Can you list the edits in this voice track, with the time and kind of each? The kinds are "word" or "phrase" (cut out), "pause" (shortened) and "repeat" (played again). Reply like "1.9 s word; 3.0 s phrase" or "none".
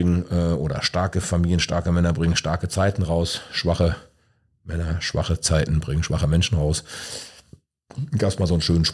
none